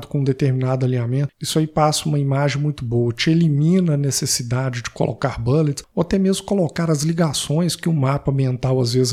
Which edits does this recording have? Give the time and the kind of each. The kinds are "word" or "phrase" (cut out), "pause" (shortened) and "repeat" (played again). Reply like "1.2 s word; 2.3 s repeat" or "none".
none